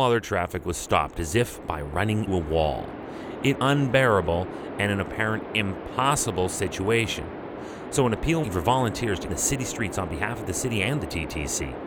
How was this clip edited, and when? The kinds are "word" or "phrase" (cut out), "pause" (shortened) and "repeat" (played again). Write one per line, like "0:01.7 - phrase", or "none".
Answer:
0:02.3 - word
0:03.5 - word
0:08.4 - phrase
0:09.3 - word